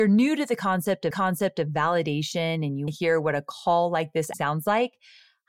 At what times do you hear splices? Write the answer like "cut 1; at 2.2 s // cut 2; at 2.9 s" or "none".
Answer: cut 1; at 1.1 s // cut 2; at 2.9 s // cut 3; at 4.3 s